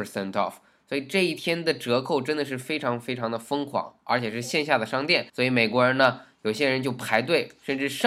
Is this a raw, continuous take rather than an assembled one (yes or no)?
no